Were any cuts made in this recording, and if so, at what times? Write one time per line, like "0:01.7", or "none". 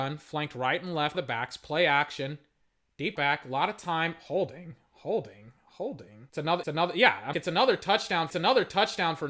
0:01.1
0:03.2
0:06.3
0:06.6
0:07.3
0:08.3

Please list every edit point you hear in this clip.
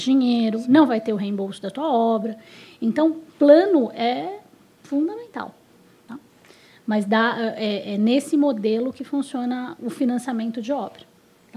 none

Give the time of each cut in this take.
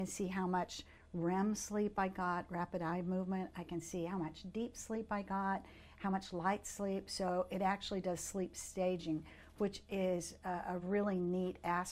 none

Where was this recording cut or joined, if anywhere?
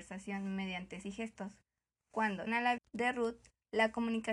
0:01.0
0:02.5
0:02.8

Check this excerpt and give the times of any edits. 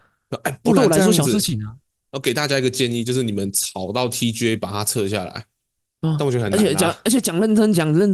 none

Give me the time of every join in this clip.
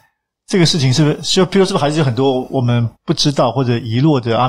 0:03.0

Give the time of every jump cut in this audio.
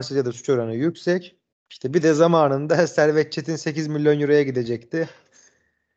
0:01.5

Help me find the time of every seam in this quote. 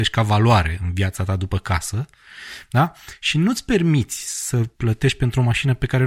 0:04.7

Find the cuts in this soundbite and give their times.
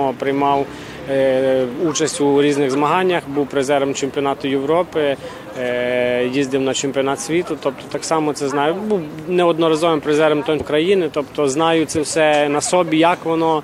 0:10.6

